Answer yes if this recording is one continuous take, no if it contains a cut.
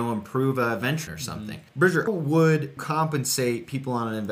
no